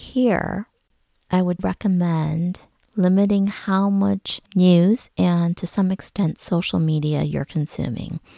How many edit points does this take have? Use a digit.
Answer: 2